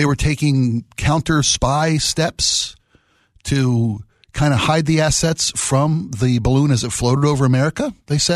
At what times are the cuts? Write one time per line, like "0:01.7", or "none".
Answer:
none